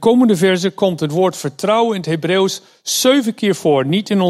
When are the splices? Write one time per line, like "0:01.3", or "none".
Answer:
none